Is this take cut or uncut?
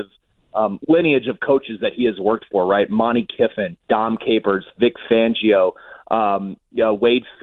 cut